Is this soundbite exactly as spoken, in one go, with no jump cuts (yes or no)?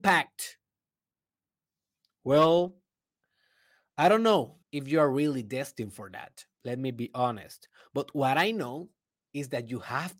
no